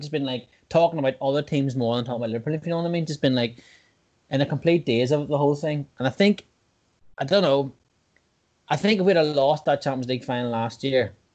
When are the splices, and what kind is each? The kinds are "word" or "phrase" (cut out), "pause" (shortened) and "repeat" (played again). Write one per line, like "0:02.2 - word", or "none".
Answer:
none